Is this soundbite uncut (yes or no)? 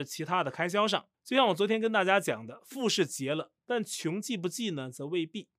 no